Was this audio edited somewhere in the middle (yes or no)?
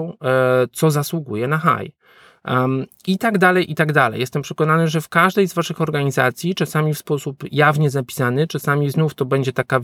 no